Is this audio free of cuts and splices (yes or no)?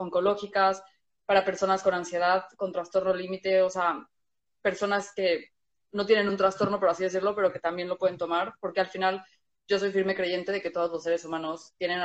yes